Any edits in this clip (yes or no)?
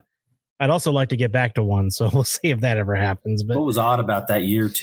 no